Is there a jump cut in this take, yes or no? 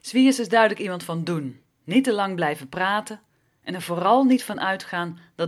no